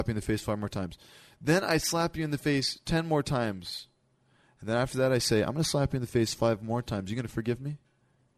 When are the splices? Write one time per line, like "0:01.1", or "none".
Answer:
none